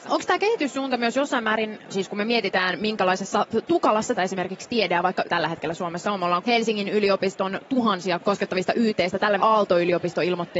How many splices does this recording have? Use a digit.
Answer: 6